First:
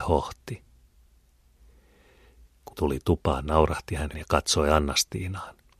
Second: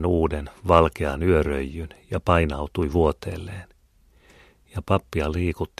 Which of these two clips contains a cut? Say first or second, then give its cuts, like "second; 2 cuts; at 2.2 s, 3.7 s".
first; 2 cuts; at 2.7 s, 4.1 s